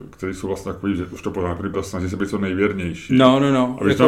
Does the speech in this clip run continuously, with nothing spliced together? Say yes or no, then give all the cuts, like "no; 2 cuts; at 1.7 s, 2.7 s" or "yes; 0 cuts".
no; 1 cut; at 1.7 s